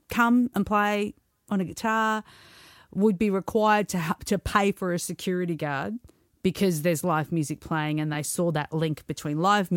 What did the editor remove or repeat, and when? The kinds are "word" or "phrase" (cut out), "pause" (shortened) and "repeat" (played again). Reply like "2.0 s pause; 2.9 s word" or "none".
none